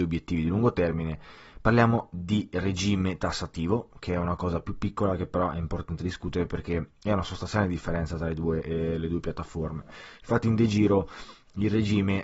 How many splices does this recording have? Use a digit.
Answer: 0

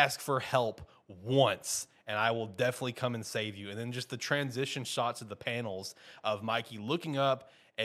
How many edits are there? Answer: 0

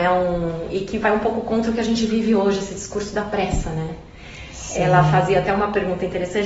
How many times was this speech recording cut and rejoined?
0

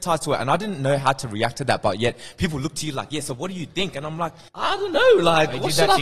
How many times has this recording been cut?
1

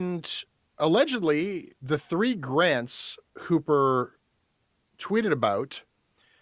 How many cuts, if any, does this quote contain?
2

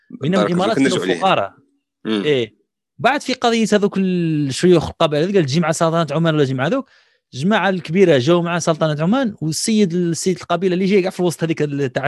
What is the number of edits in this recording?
0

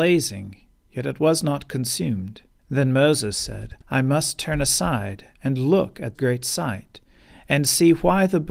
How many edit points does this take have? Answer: 3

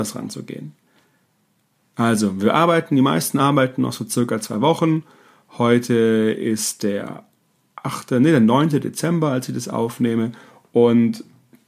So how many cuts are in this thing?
0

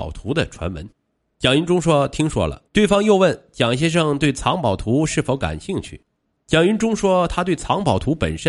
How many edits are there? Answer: 3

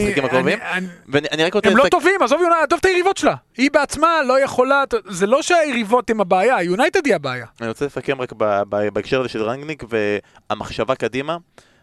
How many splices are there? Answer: 0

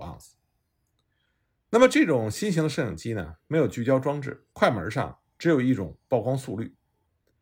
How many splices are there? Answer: 2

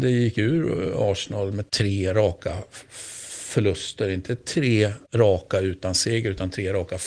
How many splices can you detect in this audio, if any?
2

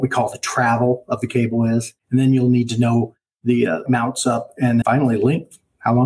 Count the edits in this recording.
3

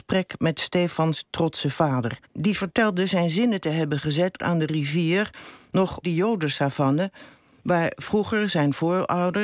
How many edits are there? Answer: 3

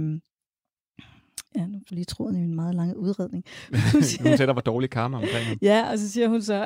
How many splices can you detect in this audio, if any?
2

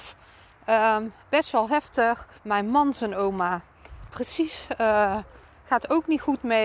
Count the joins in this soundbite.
3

